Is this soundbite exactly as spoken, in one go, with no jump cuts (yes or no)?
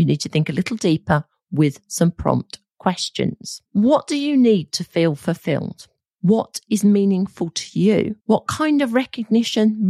no